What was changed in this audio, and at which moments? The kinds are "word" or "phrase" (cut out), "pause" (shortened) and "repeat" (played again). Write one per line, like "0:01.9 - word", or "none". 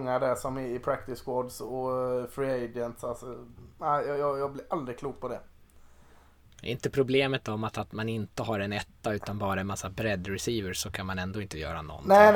none